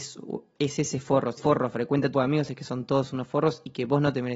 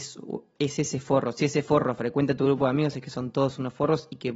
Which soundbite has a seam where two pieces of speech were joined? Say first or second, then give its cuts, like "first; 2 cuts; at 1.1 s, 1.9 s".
first; 2 cuts; at 1.4 s, 2.1 s